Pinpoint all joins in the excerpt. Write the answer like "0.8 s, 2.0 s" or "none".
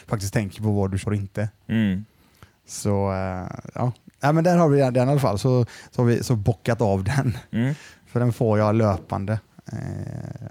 1.0 s